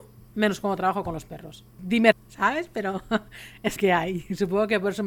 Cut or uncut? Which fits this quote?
cut